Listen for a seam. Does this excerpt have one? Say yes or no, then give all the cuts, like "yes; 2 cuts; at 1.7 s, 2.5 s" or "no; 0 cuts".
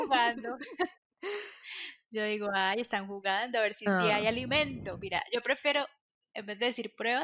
yes; 1 cut; at 1.0 s